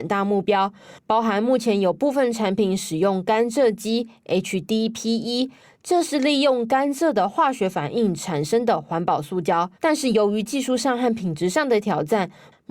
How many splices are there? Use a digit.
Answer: 1